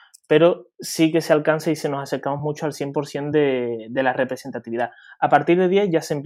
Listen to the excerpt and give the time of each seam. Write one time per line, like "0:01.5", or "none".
none